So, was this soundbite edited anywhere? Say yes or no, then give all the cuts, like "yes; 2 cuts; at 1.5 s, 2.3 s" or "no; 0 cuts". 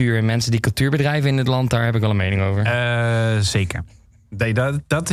no; 0 cuts